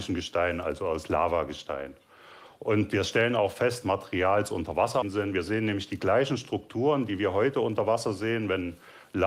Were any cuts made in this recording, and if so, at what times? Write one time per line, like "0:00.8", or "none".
0:03.8
0:05.0